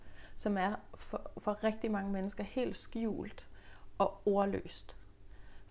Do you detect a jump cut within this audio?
no; 0 cuts

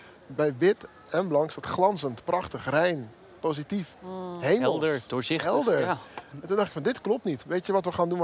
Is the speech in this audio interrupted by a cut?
no; 0 cuts

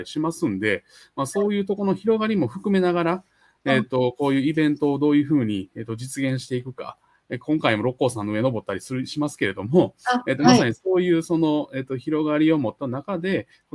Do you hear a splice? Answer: no; 0 cuts

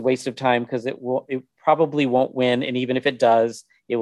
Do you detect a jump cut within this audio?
no; 0 cuts

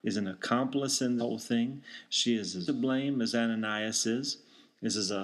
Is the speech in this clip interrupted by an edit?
yes; 2 cuts; at 1.2 s, 2.7 s

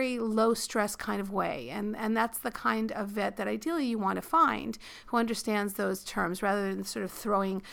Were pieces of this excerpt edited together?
no; 0 cuts

